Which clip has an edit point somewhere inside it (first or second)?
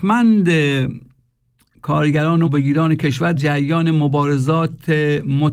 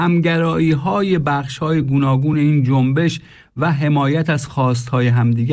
first